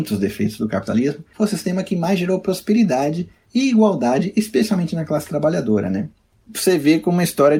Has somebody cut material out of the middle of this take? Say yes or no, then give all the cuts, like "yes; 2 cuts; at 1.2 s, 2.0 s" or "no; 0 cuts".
no; 0 cuts